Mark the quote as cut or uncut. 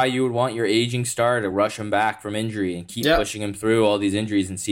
uncut